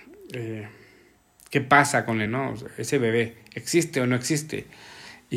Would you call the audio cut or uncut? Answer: cut